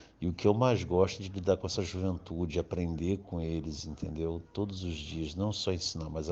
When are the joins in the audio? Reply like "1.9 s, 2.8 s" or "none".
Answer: none

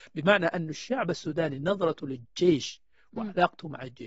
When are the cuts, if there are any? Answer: none

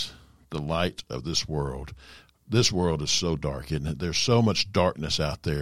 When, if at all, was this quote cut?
none

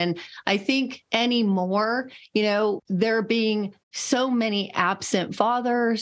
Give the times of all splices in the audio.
2.8 s, 3.8 s

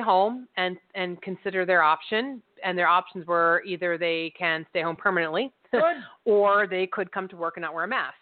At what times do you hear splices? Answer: none

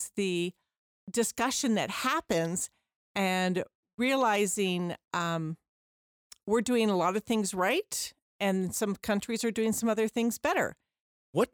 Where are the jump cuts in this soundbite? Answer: none

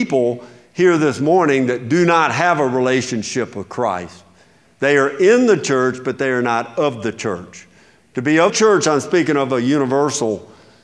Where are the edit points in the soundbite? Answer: 8.5 s

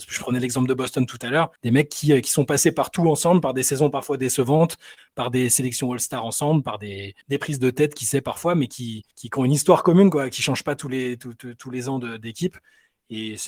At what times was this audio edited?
1.6 s, 7.2 s, 9.1 s

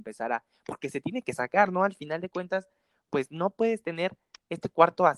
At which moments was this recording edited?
none

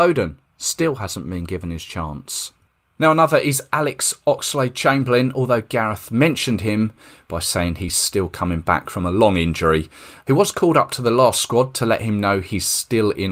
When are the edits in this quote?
none

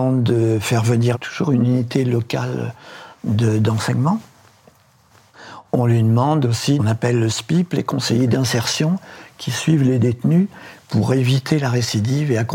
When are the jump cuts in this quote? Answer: 1.1 s, 6.8 s

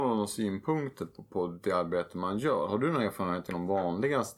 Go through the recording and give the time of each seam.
3.5 s

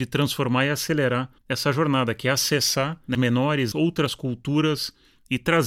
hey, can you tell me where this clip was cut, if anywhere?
1.4 s, 3.1 s, 3.7 s

